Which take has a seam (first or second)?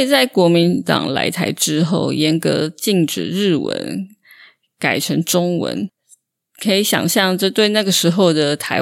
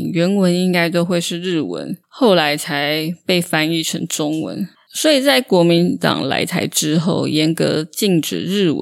second